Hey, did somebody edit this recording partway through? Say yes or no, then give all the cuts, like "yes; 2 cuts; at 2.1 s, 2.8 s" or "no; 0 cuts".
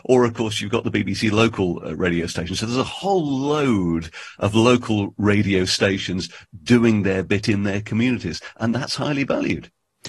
no; 0 cuts